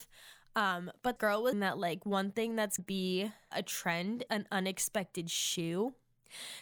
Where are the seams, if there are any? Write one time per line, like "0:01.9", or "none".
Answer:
0:01.2
0:01.5
0:02.8
0:03.5
0:04.3